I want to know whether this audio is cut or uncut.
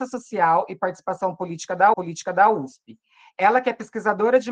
cut